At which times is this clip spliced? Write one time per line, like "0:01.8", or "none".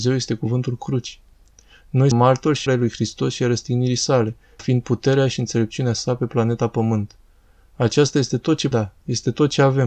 0:02.1
0:02.7
0:04.6
0:08.7